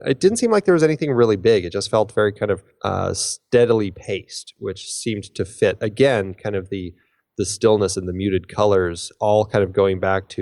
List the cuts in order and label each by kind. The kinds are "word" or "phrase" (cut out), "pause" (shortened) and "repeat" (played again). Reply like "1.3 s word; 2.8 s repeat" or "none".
none